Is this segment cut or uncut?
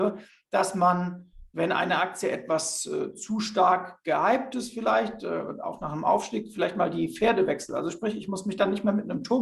uncut